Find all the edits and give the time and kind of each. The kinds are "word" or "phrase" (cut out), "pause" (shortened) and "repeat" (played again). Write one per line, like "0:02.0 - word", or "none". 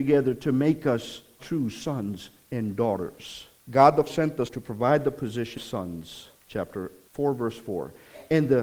0:01.4 - word
0:04.1 - word
0:04.5 - word
0:05.6 - word

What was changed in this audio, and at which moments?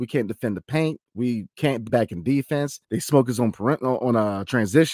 0:01.9 - word
0:02.8 - pause

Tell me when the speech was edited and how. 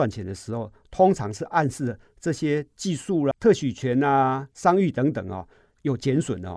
0:03.3 - word

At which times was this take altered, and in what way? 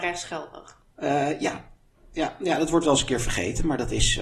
none

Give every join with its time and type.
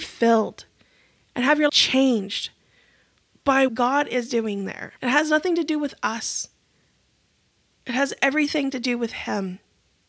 0:01.7 - word
0:03.7 - word
0:05.0 - pause

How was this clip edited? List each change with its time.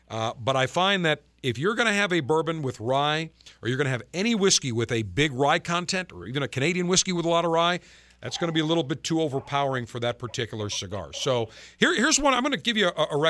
none

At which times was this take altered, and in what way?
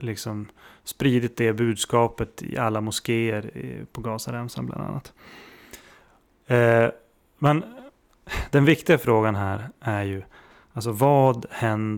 none

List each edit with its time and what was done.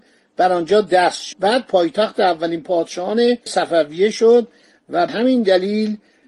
0:01.3 - word
0:03.5 - word
0:05.1 - word

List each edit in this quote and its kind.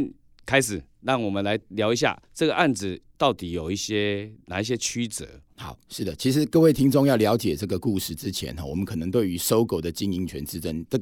0:02.2 - pause

